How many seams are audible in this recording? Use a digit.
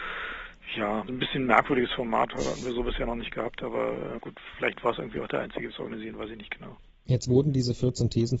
2